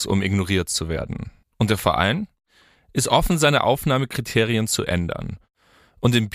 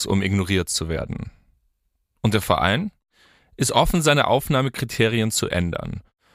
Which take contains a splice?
first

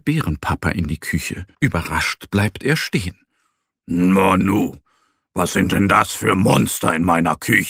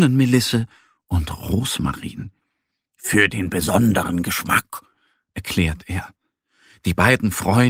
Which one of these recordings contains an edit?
first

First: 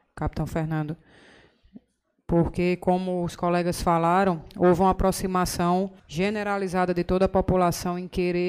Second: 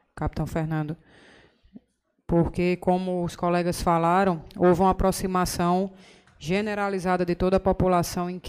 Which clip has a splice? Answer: first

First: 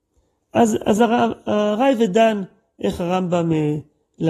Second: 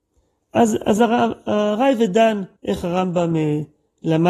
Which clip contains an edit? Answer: second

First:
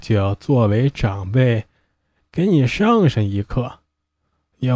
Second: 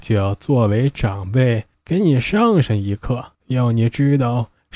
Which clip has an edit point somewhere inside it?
second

